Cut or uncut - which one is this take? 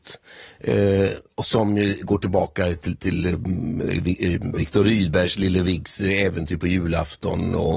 uncut